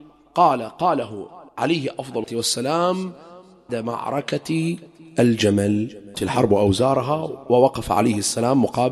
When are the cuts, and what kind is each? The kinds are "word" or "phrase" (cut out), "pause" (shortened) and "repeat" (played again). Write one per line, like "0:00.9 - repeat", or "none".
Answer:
0:01.5 - pause
0:02.2 - word
0:03.7 - word
0:06.1 - phrase